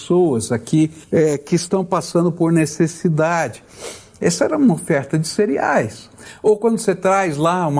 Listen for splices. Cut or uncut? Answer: cut